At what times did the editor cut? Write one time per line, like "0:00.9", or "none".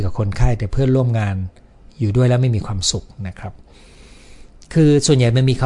none